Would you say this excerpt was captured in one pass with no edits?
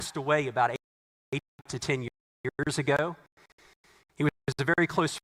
yes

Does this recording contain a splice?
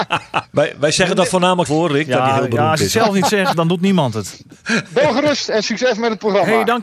yes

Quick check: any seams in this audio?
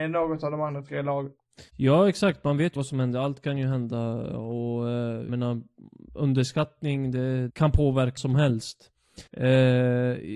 yes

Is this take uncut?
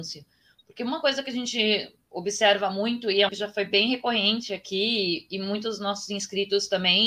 no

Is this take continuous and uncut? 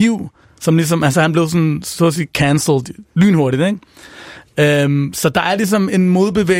yes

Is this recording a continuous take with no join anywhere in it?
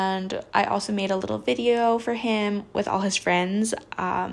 yes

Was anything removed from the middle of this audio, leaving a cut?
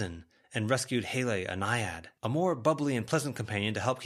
yes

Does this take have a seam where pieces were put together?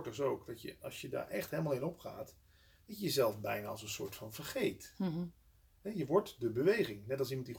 no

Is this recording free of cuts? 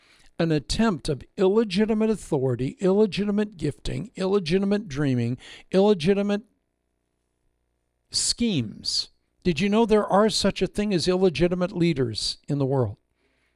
no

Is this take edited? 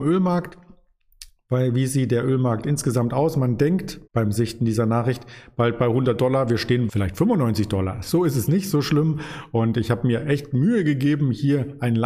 yes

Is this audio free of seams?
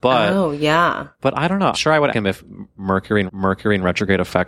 no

